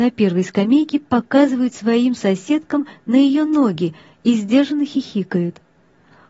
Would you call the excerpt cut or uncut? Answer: uncut